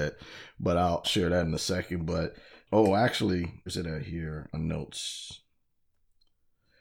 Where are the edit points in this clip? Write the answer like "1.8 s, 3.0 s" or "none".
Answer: 1.0 s, 2.6 s, 3.7 s, 4.5 s

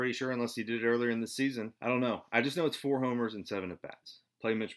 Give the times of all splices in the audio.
1.8 s

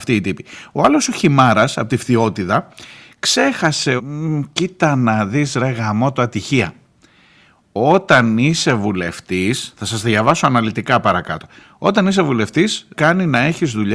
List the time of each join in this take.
4.0 s, 12.9 s

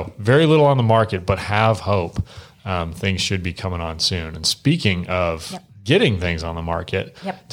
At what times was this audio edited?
none

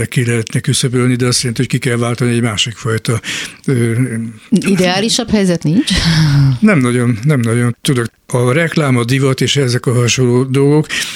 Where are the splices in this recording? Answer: none

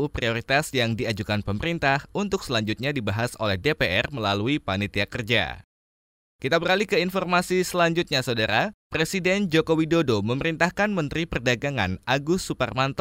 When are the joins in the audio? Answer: none

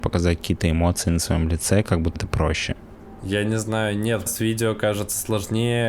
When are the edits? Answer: 2.2 s, 4.3 s

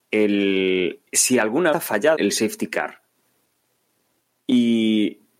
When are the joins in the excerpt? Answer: 1.1 s, 1.7 s, 2.2 s

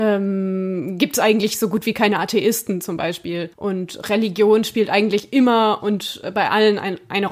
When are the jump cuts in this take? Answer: 3.5 s

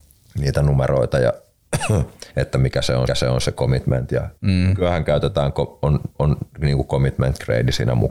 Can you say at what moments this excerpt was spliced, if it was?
2.3 s, 3.1 s, 4.4 s, 6.1 s

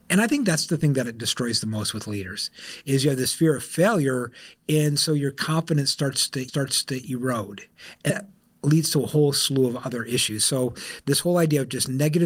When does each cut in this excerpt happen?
6.5 s, 8.1 s

